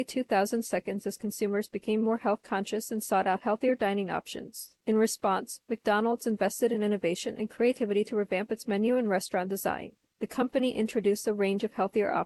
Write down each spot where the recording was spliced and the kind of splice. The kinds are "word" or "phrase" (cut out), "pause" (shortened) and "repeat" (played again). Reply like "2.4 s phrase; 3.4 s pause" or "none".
none